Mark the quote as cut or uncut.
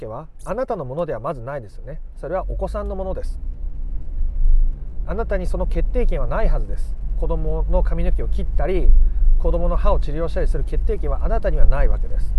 uncut